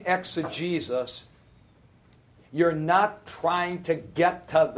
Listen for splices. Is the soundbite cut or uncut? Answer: uncut